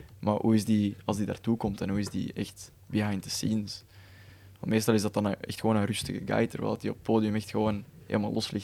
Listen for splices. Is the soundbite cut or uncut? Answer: uncut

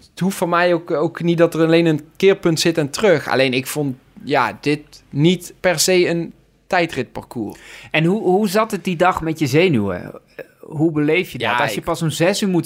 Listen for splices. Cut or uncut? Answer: cut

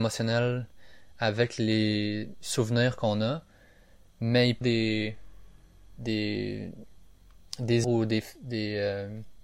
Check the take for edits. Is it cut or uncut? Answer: cut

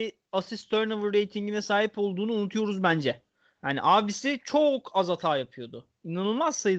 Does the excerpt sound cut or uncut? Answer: uncut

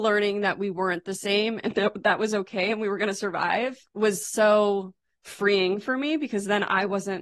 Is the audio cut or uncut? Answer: uncut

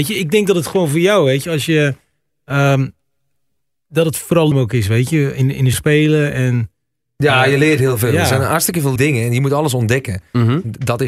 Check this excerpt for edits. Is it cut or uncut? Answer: cut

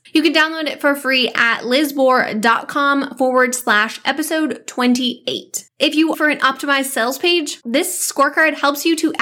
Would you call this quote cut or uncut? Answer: cut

